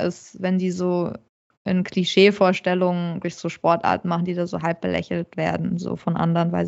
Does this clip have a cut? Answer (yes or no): yes